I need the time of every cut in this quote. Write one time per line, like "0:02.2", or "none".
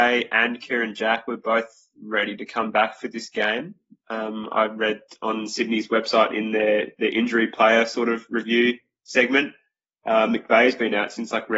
none